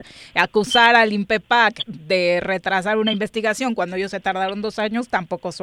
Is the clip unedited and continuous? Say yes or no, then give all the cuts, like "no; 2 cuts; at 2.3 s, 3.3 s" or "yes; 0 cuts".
yes; 0 cuts